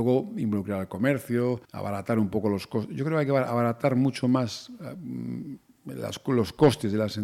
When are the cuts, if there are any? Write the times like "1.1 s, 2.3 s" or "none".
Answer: 1.6 s